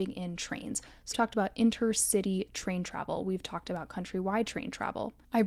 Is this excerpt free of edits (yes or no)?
no